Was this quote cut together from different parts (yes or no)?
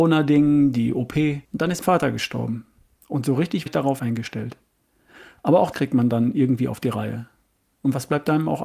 yes